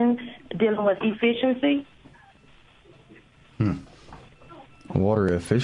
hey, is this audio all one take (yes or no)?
no